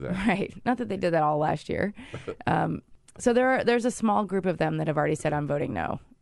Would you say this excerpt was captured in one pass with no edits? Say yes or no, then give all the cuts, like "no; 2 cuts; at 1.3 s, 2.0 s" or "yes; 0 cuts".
yes; 0 cuts